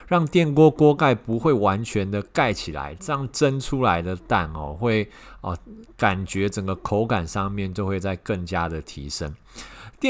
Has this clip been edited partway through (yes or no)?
no